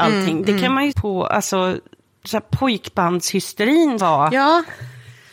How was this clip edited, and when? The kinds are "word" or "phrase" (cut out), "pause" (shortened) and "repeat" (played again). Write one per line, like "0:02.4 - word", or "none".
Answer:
0:00.9 - word
0:04.0 - word